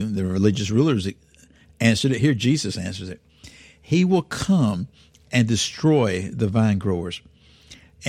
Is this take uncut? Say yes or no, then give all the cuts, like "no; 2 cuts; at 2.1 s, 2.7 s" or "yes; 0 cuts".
yes; 0 cuts